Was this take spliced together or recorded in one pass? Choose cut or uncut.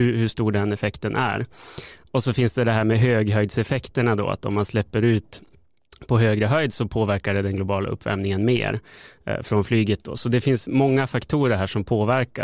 cut